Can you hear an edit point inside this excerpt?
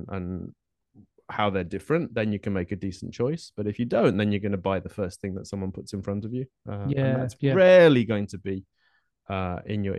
no; 0 cuts

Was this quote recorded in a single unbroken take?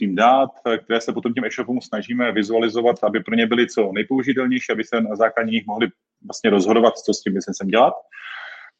yes; 0 cuts

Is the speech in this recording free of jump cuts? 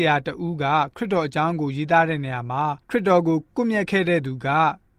no; 1 cut; at 2.8 s

